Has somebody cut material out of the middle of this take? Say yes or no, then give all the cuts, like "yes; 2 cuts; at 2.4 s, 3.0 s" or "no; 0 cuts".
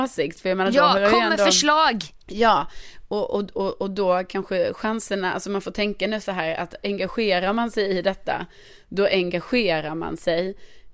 no; 0 cuts